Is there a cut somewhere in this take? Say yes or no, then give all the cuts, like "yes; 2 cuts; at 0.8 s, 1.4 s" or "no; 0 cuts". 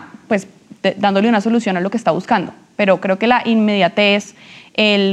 no; 0 cuts